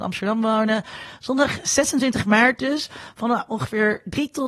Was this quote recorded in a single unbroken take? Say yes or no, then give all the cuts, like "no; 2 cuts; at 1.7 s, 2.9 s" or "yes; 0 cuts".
yes; 0 cuts